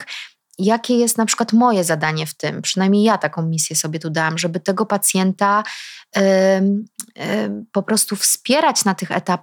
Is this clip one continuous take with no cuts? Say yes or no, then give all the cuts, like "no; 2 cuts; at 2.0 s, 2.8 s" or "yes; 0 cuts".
yes; 0 cuts